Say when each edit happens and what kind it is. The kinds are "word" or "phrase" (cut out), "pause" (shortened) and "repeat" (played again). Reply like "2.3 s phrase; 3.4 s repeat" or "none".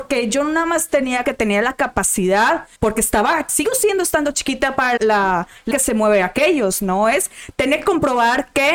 1.2 s phrase; 2.8 s pause; 3.5 s word; 5.0 s word; 5.7 s word